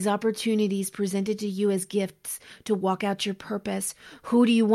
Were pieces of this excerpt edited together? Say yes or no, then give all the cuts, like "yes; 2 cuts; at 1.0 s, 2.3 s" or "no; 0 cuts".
no; 0 cuts